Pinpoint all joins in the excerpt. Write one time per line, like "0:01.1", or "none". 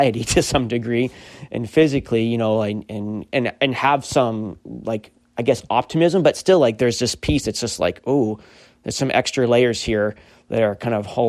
none

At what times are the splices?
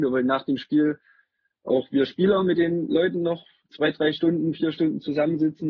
none

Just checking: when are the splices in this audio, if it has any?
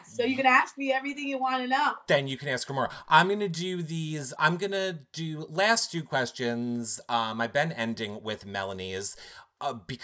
0:04.4

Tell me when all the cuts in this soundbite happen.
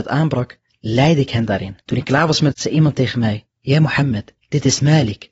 0:01.8
0:02.5
0:03.5
0:04.4

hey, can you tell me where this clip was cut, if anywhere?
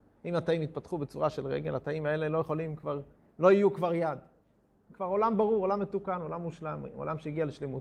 none

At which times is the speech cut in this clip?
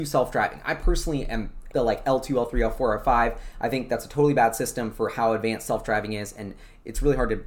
0:01.7

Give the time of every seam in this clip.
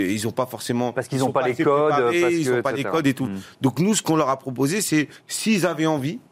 0:05.2

